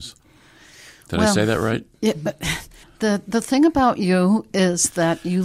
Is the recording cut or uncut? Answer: cut